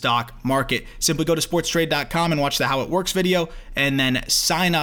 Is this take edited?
no; 0 cuts

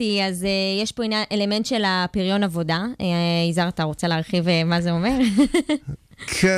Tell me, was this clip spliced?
no; 0 cuts

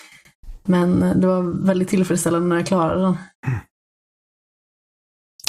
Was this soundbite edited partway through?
yes; 1 cut; at 3.3 s

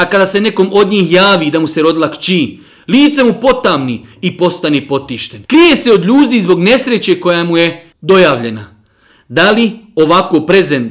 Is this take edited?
yes; 2 cuts; at 5.4 s, 7.9 s

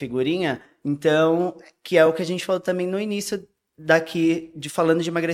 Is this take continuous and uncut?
yes; 0 cuts

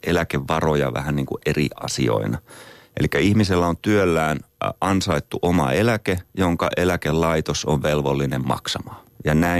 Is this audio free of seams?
yes; 0 cuts

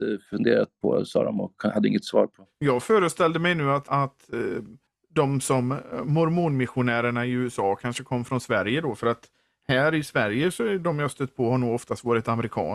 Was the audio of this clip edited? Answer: yes; 2 cuts; at 3.9 s, 4.9 s

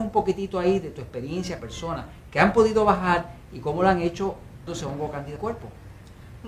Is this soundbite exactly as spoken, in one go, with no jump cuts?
no; 3 cuts; at 1.6 s, 4.7 s, 5.4 s

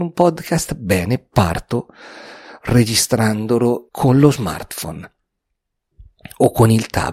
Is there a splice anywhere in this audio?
yes; 1 cut; at 3.9 s

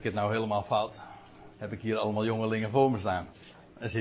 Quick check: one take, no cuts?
no; 1 cut; at 1.5 s

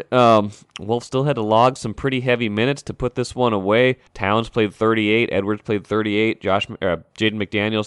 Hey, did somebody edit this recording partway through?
yes; 1 cut; at 4.1 s

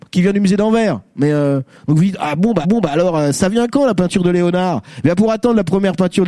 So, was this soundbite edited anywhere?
yes; 1 cut; at 2.6 s

